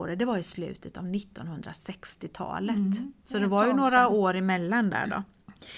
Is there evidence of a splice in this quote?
no; 0 cuts

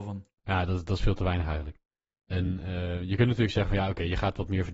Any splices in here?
no; 0 cuts

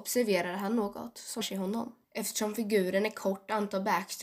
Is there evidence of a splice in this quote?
yes; 2 cuts; at 1.4 s, 2.0 s

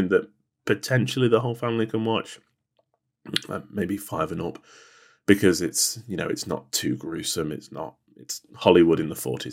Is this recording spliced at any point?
no; 0 cuts

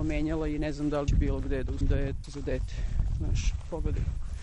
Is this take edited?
yes; 3 cuts; at 1.1 s, 1.8 s, 2.2 s

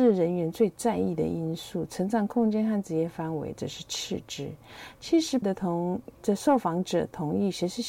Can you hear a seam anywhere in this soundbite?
yes; 2 cuts; at 5.4 s, 6.1 s

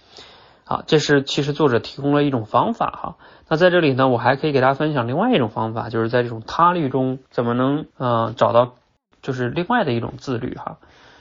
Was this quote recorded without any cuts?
no; 2 cuts; at 7.3 s, 7.9 s

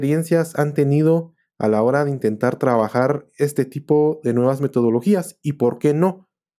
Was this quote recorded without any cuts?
yes; 0 cuts

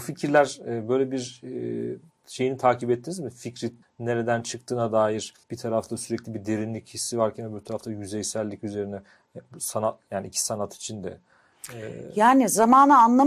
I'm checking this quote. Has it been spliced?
yes; 3 cuts; at 2.1 s, 3.8 s, 5.4 s

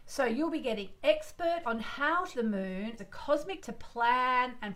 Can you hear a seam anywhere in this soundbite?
yes; 4 cuts; at 1.6 s, 2.3 s, 3.0 s, 3.6 s

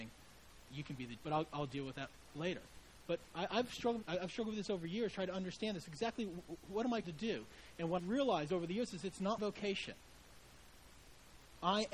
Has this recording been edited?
yes; 5 cuts; at 1.2 s, 4.0 s, 7.0 s, 8.0 s, 9.4 s

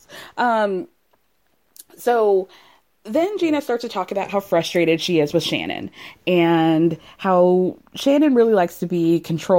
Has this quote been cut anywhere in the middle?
no; 0 cuts

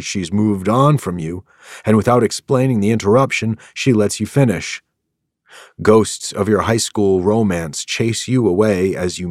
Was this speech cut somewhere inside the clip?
no; 0 cuts

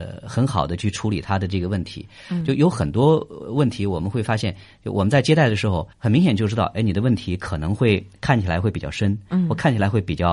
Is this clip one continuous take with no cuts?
no; 1 cut; at 5.9 s

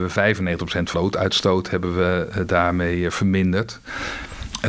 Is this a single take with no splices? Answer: no; 1 cut; at 0.9 s

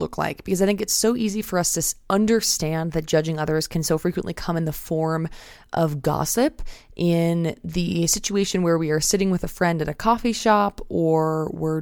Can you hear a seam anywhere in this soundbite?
no; 0 cuts

